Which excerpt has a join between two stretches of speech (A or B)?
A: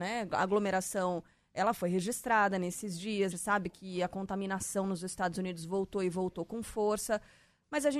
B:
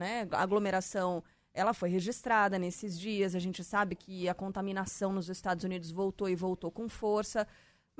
A